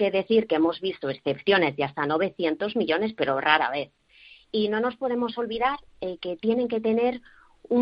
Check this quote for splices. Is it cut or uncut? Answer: uncut